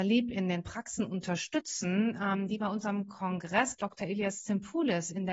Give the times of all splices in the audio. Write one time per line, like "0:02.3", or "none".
none